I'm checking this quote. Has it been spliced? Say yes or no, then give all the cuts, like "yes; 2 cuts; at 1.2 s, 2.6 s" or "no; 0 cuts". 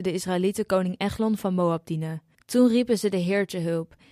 yes; 1 cut; at 2.3 s